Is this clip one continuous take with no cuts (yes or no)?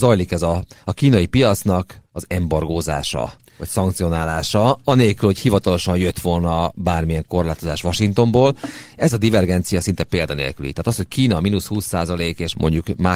yes